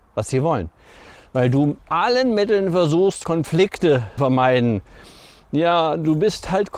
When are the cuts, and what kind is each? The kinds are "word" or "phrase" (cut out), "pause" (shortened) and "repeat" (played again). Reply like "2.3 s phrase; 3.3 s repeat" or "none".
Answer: 1.8 s word; 3.2 s word; 4.2 s word